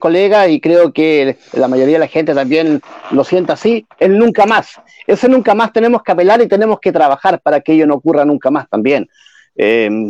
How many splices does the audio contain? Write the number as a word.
zero